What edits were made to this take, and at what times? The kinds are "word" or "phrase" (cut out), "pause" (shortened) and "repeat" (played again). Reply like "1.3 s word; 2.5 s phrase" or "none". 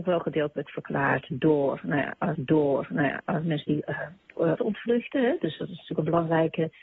2.3 s repeat; 4.6 s phrase